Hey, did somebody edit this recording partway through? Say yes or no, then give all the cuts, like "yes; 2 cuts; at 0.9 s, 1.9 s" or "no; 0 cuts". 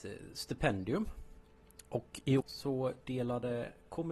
yes; 1 cut; at 2.4 s